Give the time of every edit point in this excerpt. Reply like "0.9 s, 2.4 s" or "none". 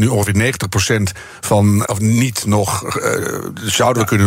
1.8 s